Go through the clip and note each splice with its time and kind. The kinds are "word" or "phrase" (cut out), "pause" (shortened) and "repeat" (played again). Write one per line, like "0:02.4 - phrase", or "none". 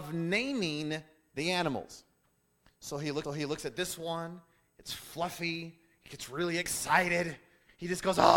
0:03.2 - repeat